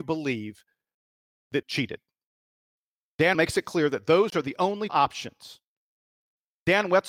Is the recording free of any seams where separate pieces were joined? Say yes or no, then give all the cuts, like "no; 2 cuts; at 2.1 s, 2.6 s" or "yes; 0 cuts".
no; 3 cuts; at 1.6 s, 3.3 s, 4.9 s